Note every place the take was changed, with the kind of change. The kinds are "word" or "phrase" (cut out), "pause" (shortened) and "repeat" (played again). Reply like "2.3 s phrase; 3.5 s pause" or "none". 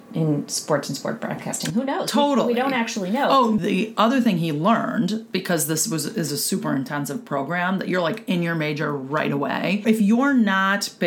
none